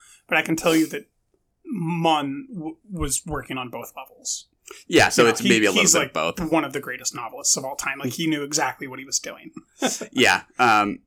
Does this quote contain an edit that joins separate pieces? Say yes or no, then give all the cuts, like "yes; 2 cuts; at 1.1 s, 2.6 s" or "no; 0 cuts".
no; 0 cuts